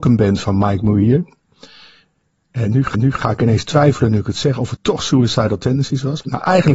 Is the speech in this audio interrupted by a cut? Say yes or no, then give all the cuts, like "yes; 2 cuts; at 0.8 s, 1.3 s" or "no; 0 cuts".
yes; 2 cuts; at 2.9 s, 4.8 s